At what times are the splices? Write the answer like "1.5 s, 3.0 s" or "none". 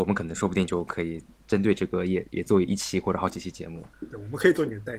3.9 s